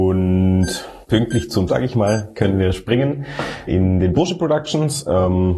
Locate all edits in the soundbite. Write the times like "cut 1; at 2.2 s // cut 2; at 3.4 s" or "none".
cut 1; at 1.0 s // cut 2; at 1.7 s // cut 3; at 3.7 s // cut 4; at 4.1 s